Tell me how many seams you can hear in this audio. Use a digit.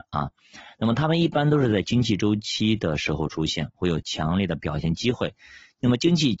0